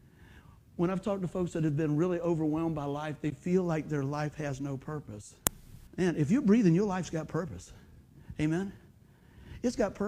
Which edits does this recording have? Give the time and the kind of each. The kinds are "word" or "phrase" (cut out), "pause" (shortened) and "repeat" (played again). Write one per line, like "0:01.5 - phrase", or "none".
0:05.9 - pause